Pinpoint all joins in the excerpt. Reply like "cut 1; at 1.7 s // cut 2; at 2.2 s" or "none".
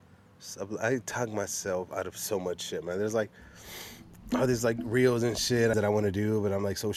cut 1; at 5.7 s